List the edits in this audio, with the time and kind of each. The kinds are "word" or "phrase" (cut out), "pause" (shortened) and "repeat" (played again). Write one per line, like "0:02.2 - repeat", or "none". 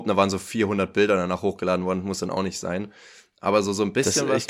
none